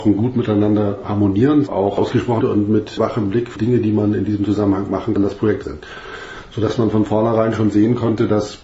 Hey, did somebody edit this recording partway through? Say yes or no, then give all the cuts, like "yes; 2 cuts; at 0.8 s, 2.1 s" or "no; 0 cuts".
yes; 5 cuts; at 1.7 s, 2.4 s, 3.6 s, 5.2 s, 5.6 s